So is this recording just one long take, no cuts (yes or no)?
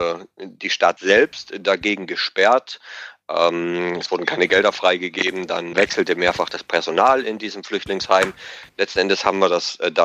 no